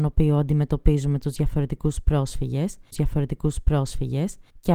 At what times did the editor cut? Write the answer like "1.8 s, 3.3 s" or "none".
2.9 s